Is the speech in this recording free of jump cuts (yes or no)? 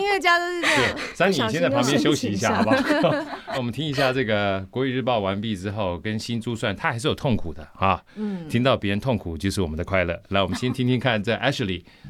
no